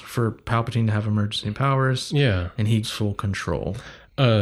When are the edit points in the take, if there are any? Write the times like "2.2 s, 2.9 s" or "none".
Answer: 2.8 s

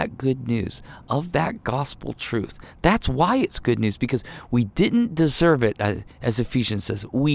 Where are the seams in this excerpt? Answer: 6.1 s

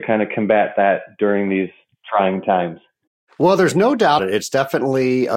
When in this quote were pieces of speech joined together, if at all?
4.2 s

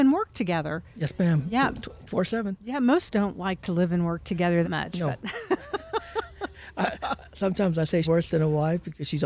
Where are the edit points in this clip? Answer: 2.1 s, 3.1 s, 4.6 s, 8.0 s

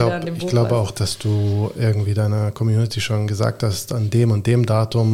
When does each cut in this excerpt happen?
none

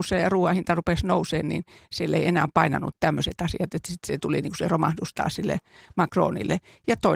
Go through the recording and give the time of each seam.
none

